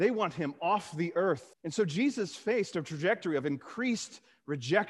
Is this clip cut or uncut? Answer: cut